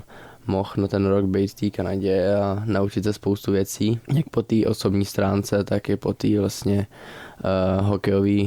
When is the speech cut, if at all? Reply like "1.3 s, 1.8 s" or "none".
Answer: 4.0 s